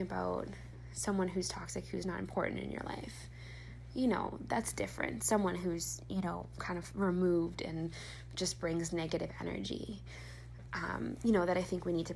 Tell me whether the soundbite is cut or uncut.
uncut